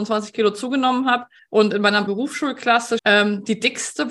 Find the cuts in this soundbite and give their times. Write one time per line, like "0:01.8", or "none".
0:01.4
0:02.1
0:03.0

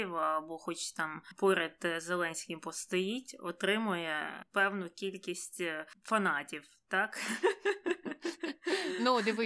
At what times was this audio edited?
none

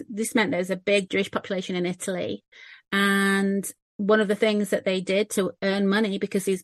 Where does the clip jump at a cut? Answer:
0:01.1

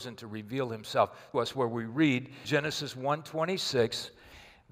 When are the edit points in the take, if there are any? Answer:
0:01.3
0:02.4

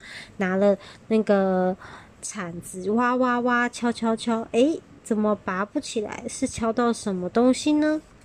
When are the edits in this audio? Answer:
none

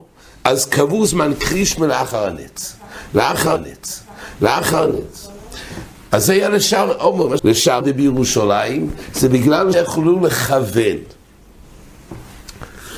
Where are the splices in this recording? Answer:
0:03.6
0:07.4
0:07.8
0:09.7

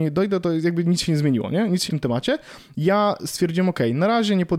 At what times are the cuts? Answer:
0:01.9

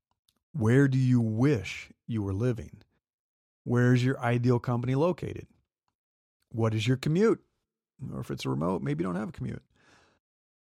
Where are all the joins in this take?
none

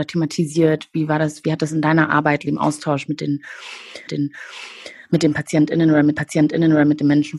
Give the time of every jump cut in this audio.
0:02.5
0:04.1
0:06.2

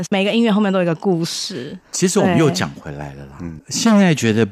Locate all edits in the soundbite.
0:01.8

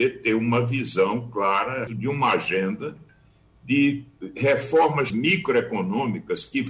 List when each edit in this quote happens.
0:01.9
0:05.1

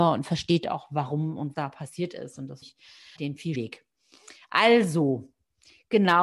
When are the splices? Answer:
0:01.5
0:02.6
0:03.2
0:03.5

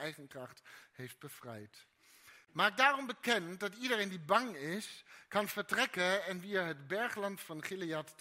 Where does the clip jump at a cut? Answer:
none

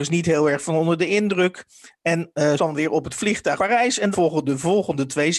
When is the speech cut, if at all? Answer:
0:02.6
0:03.6
0:04.1

